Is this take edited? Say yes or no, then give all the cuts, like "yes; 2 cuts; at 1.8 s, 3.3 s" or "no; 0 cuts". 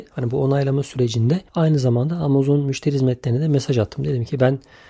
yes; 1 cut; at 1.5 s